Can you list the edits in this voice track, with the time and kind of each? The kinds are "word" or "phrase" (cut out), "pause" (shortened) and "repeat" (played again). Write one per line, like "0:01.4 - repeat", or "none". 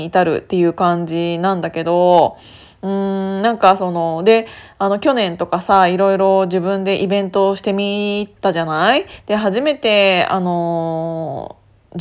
none